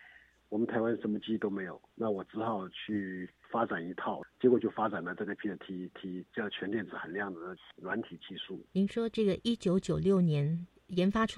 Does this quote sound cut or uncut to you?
cut